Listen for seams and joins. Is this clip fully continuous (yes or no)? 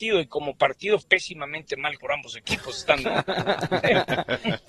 no